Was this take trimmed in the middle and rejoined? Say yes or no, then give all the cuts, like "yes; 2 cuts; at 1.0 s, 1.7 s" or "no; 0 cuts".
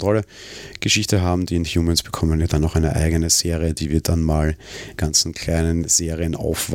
yes; 1 cut; at 5.0 s